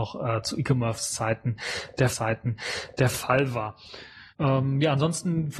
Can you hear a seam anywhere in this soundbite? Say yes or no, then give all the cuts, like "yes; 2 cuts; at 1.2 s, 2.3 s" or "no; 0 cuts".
yes; 2 cuts; at 2.1 s, 4.3 s